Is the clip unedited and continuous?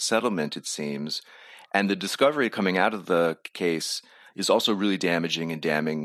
yes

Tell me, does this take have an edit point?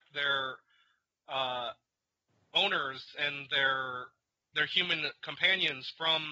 no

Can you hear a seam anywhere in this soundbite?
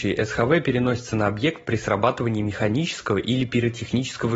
no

